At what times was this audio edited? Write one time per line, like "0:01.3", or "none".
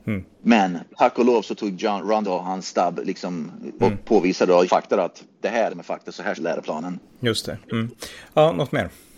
0:02.2
0:03.8
0:04.7
0:05.7
0:06.3
0:07.6

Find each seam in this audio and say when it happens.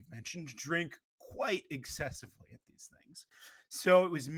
none

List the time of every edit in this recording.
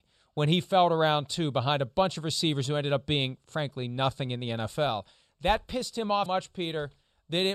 0:06.3

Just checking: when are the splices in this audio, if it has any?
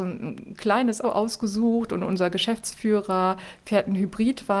0:01.0

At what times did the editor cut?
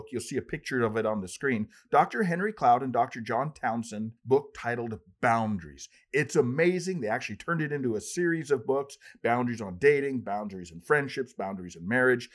0:04.2

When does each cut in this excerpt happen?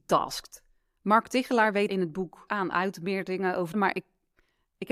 0:01.9
0:02.5
0:03.7

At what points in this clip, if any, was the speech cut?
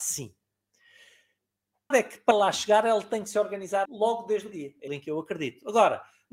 0:01.9
0:02.3
0:03.9
0:04.5
0:04.9

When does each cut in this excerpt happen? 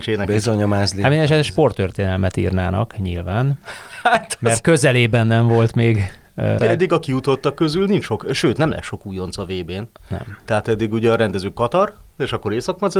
0:06.6

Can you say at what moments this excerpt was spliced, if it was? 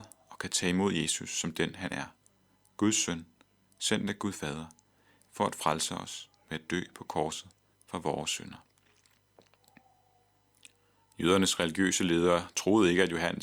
none

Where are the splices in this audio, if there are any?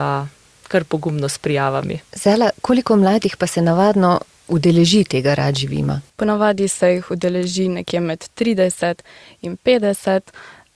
0:02.0
0:06.1

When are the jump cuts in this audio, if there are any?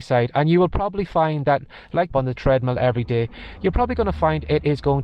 0:02.1

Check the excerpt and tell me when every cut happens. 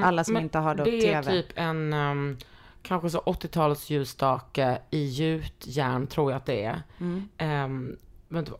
none

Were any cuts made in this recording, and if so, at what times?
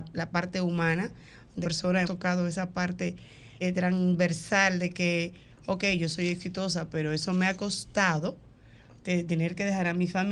0:01.6
0:02.0
0:03.6

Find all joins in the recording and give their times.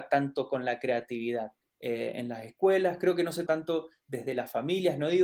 0:01.6
0:03.5

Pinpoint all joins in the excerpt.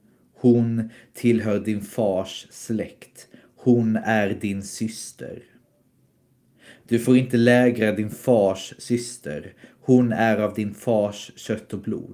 none

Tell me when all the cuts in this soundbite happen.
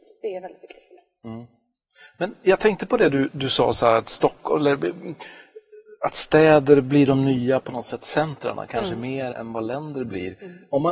0:09.3

